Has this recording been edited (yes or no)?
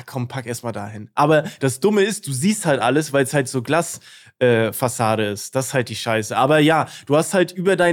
no